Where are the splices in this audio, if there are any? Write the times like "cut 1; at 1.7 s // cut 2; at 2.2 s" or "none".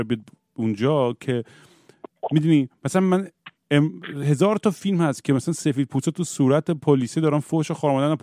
none